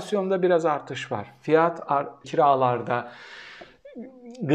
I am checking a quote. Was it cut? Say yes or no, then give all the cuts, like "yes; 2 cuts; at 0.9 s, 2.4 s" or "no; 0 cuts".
yes; 1 cut; at 2.2 s